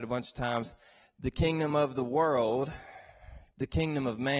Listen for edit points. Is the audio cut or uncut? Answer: uncut